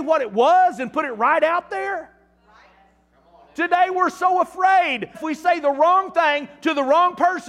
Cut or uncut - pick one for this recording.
cut